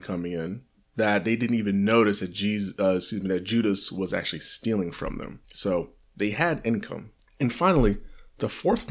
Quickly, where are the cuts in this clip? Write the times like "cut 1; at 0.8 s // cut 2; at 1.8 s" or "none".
cut 1; at 5.4 s // cut 2; at 7.2 s